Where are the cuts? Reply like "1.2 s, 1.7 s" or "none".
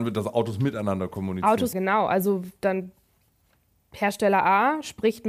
1.7 s